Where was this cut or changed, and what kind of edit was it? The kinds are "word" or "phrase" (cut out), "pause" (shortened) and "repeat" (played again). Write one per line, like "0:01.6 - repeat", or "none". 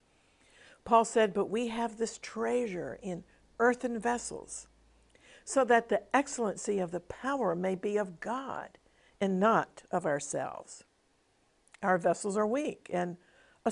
none

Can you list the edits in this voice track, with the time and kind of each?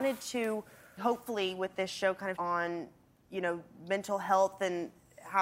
0:01.0 - word
0:02.4 - phrase

